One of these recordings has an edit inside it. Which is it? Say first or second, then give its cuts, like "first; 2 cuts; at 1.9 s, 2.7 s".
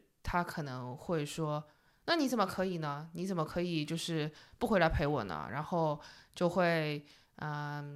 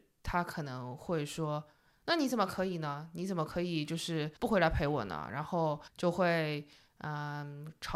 second; 2 cuts; at 4.4 s, 5.9 s